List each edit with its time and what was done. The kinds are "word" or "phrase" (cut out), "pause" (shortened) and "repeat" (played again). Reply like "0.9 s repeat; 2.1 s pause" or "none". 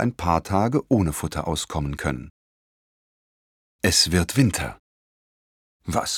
none